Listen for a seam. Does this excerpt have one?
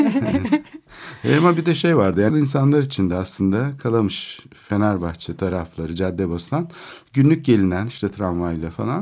yes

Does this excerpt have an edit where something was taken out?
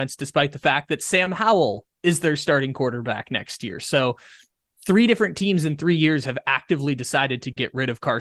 no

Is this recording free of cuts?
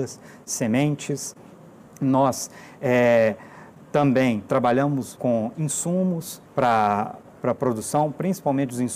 no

